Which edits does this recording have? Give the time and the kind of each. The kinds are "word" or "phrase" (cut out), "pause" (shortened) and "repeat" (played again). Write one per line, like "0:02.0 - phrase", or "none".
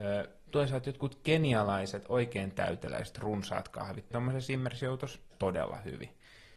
0:04.1 - word
0:05.3 - word